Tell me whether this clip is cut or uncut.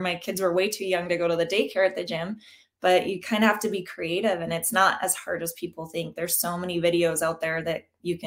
uncut